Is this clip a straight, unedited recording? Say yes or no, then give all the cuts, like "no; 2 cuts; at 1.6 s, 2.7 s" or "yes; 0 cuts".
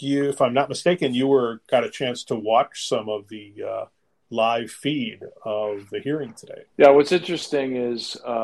no; 1 cut; at 6.7 s